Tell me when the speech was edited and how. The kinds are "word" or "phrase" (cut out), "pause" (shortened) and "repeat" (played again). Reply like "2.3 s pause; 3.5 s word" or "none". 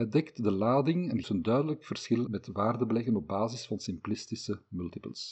1.2 s word; 2.3 s word

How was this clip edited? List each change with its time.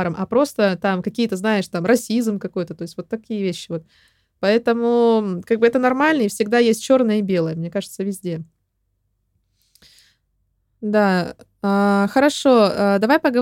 none

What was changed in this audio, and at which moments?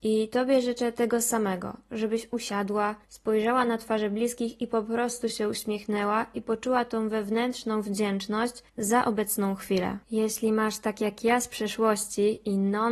3.0 s pause; 8.7 s pause; 10.0 s pause

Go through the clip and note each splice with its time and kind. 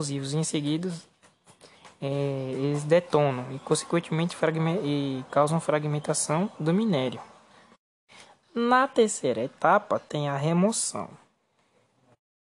none

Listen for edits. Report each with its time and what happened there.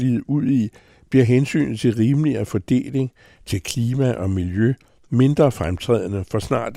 none

